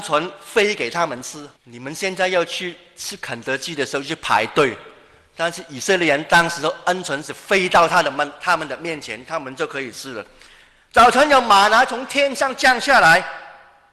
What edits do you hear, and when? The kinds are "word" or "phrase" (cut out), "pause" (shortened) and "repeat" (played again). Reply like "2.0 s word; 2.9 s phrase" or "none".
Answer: 1.6 s pause